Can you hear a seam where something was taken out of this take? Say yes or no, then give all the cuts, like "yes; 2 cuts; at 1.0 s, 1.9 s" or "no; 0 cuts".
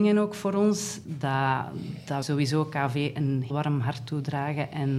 yes; 2 cuts; at 2.2 s, 3.5 s